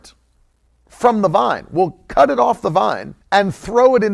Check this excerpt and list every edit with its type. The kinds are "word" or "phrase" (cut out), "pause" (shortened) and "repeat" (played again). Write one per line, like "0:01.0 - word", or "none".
0:03.2 - pause